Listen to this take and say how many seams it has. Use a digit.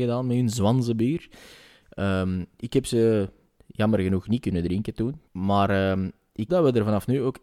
2